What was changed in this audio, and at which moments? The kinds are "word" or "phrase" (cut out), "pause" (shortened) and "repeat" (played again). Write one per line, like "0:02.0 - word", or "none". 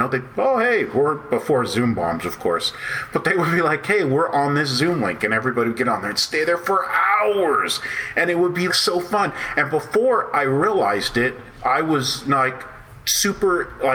0:08.7 - word